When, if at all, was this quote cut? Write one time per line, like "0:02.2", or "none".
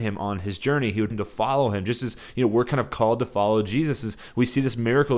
0:01.1